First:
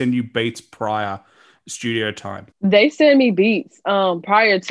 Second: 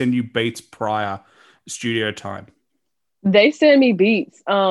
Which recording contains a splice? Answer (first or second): first